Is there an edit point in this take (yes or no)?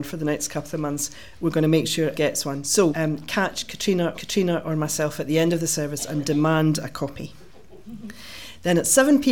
yes